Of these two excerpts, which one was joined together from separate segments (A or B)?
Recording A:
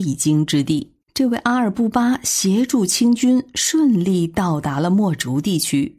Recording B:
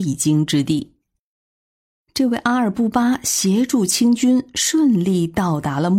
A